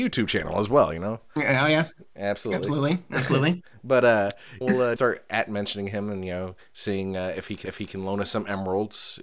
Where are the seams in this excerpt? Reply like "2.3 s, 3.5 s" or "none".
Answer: 4.6 s, 5.0 s, 7.6 s

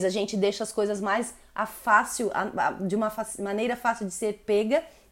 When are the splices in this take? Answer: none

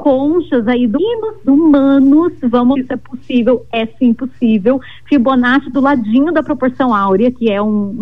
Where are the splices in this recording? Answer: 0.9 s, 1.4 s, 2.7 s, 5.7 s

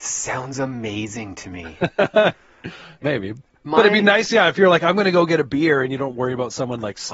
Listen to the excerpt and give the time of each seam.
3.0 s

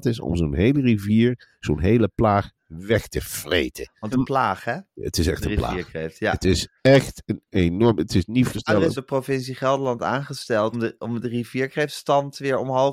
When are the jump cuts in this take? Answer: 4.1 s, 6.8 s, 8.5 s, 8.9 s, 10.7 s

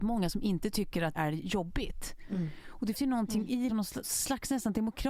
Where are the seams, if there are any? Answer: 1.1 s, 2.9 s, 3.7 s, 4.0 s

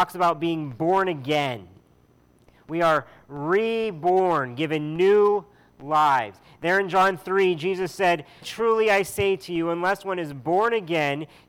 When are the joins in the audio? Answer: 8.4 s

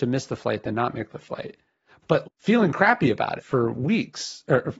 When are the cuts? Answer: 2.2 s, 3.4 s

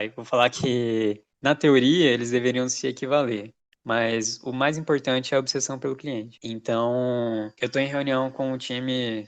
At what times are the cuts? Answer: none

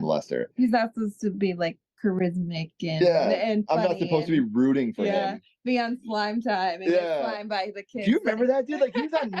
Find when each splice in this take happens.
none

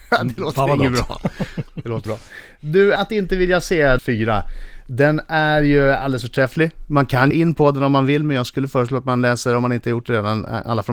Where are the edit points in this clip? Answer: 2.1 s, 3.0 s, 4.0 s, 7.3 s

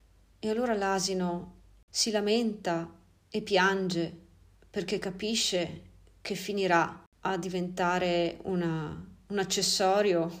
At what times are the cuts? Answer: none

